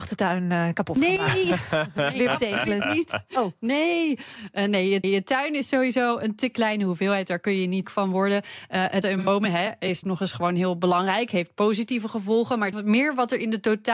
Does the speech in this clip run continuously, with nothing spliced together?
no; 5 cuts; at 5.0 s, 7.8 s, 9.0 s, 10.0 s, 12.7 s

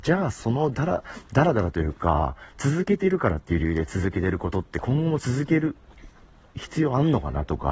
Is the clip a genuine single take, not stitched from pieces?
yes; 0 cuts

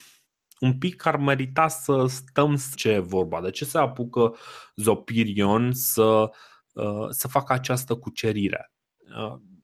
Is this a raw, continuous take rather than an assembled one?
no; 1 cut; at 2.7 s

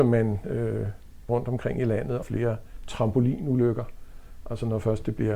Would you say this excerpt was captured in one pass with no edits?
no; 2 cuts; at 1.3 s, 2.2 s

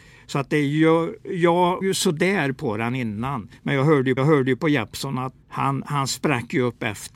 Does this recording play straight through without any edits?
no; 4 cuts; at 1.8 s, 3.6 s, 4.2 s, 5.4 s

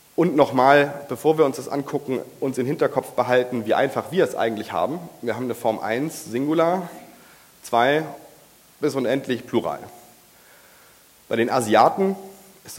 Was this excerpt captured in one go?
yes; 0 cuts

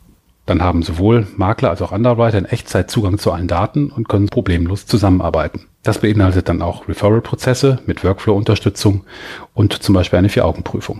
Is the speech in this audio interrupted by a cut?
yes; 2 cuts; at 4.3 s, 5.7 s

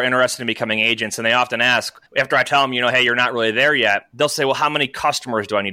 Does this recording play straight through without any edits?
no; 1 cut; at 2.1 s

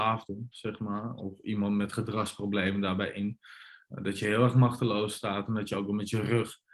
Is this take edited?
no; 0 cuts

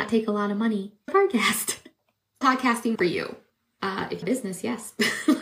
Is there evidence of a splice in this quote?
yes; 4 cuts; at 1.1 s, 2.4 s, 2.9 s, 4.2 s

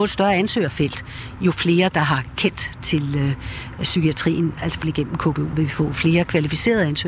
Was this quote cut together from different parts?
yes; 2 cuts; at 4.8 s, 5.5 s

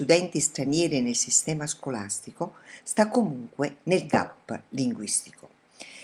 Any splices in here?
no; 0 cuts

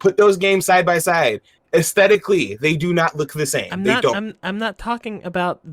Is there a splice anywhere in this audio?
no; 0 cuts

